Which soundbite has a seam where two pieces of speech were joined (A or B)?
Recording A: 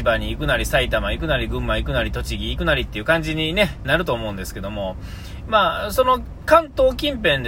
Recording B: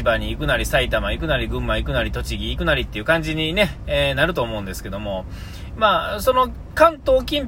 A